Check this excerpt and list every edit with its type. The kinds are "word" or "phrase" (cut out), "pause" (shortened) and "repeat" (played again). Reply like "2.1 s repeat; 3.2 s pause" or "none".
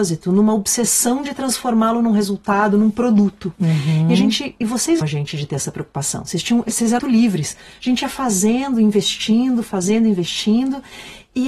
5.0 s word; 7.0 s word